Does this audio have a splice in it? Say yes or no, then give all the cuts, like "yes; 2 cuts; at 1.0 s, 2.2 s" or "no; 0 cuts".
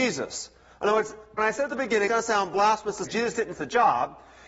yes; 4 cuts; at 1.4 s, 2.1 s, 3.1 s, 3.6 s